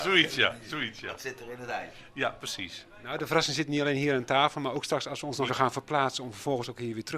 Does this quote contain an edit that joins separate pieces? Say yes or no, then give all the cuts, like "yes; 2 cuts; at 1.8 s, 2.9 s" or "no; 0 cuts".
yes; 1 cut; at 5.5 s